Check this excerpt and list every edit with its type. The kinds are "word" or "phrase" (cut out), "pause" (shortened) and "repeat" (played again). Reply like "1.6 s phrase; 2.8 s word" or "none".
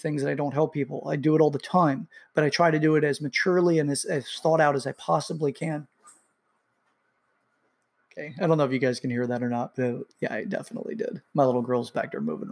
11.3 s pause